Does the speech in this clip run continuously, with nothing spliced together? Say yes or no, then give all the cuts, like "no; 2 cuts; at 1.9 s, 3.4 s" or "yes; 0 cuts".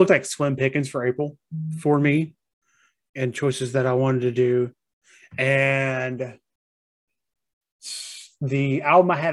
yes; 0 cuts